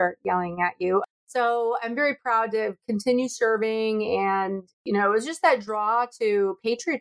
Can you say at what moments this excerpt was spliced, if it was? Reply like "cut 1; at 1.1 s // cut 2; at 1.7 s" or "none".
cut 1; at 4.7 s